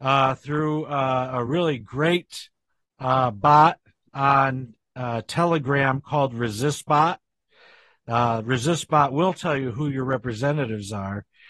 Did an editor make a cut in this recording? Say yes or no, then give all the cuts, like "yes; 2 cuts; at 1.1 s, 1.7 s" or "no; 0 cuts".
no; 0 cuts